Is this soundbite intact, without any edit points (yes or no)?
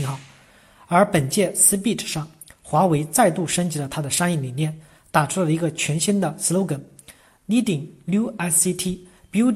yes